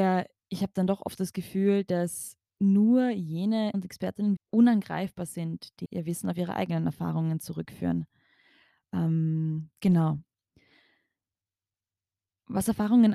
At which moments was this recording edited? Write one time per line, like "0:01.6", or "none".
0:03.7
0:04.4
0:05.8